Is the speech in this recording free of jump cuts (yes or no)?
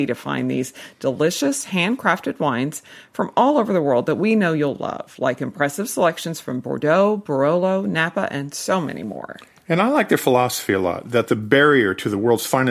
yes